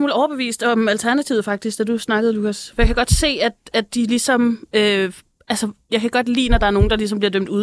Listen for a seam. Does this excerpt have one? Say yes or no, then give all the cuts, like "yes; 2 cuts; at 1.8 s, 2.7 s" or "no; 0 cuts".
no; 0 cuts